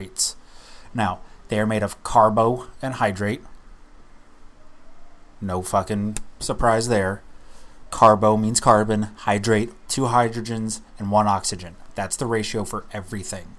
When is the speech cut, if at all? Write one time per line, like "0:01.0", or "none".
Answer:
0:09.9

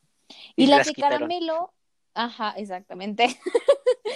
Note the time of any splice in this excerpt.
none

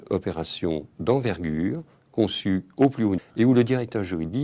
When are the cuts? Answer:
0:03.2

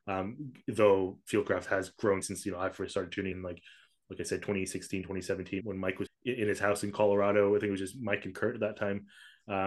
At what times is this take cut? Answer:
0:02.2
0:03.3
0:05.6
0:06.1

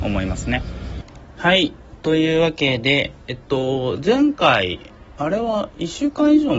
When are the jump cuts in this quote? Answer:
none

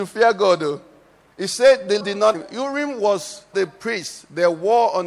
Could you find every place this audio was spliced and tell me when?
0:02.0
0:02.3
0:03.5

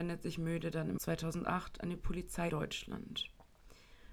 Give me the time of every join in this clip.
0:01.0
0:02.5

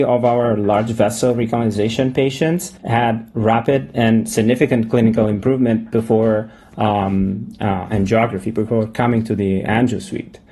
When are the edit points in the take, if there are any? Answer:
0:02.8

